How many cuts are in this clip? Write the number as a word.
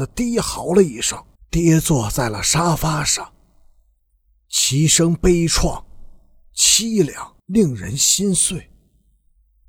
two